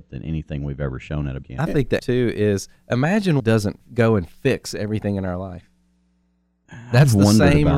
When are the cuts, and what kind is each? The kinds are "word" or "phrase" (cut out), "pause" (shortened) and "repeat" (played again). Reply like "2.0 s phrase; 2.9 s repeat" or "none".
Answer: 1.4 s word; 2.0 s word; 3.4 s phrase